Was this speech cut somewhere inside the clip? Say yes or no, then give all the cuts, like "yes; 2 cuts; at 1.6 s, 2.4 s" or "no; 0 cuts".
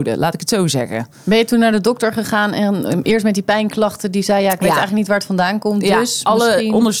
no; 0 cuts